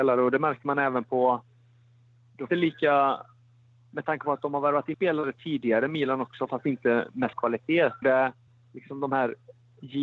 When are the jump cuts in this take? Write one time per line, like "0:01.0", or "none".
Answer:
0:02.5
0:04.9
0:07.3
0:08.0
0:08.5